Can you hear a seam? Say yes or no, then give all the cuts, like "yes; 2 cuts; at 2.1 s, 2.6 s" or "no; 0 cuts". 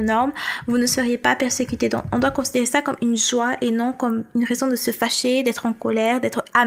no; 0 cuts